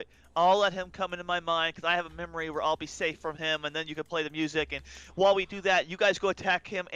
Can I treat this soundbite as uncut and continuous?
yes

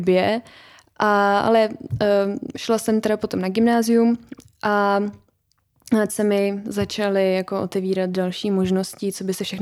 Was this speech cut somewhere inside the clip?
yes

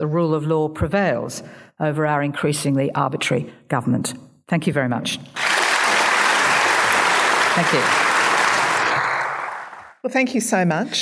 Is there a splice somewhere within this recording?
no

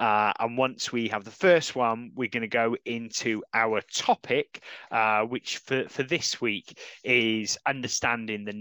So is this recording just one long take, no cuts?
yes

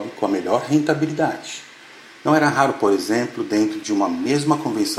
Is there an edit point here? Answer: no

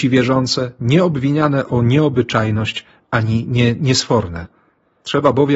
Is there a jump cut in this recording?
no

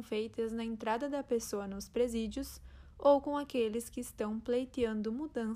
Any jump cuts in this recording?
no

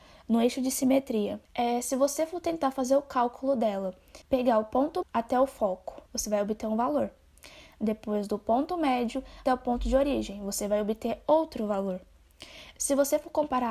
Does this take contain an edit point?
yes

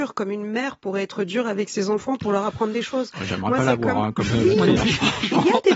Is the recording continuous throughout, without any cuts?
yes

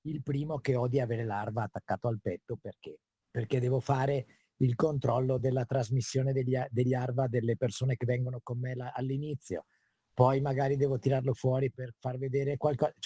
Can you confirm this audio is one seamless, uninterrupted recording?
yes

